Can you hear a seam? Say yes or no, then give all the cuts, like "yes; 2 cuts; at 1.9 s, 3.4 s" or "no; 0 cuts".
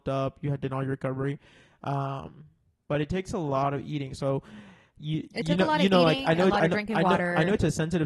no; 0 cuts